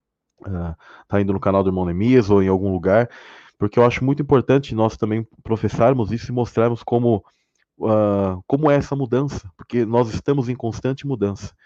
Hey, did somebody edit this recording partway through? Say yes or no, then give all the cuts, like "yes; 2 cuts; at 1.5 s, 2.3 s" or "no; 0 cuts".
no; 0 cuts